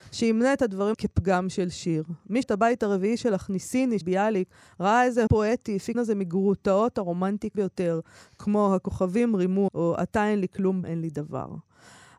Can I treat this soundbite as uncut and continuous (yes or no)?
no